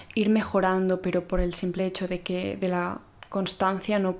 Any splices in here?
no; 0 cuts

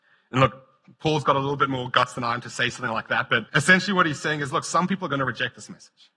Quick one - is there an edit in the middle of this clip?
yes; 1 cut; at 3.5 s

